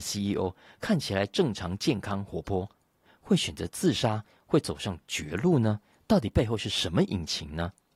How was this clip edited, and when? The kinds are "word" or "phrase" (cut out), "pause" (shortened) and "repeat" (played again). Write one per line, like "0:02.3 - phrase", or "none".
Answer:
none